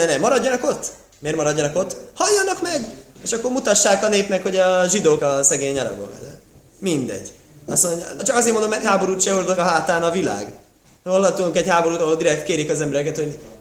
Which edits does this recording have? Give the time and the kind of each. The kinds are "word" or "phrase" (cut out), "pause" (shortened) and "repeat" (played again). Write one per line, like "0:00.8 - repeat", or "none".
0:05.2 - word
0:08.2 - word
0:08.8 - word
0:09.6 - word